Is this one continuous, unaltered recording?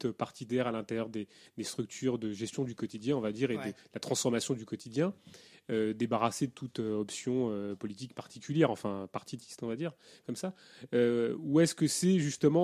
yes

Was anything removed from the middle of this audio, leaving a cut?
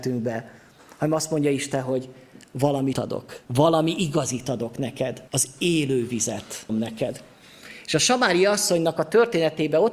yes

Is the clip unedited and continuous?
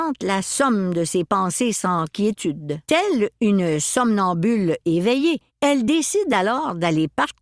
no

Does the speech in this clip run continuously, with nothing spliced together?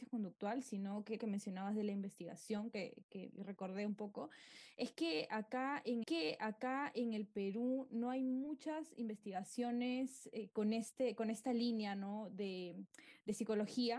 no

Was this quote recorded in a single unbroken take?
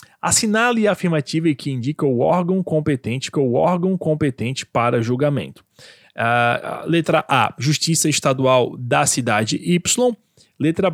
no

